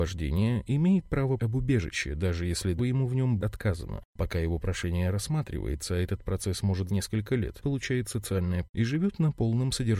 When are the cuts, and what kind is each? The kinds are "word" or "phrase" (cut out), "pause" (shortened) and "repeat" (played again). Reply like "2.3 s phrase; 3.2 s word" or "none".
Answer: 1.4 s word; 2.8 s word; 3.4 s word; 6.9 s word; 7.6 s word; 8.7 s word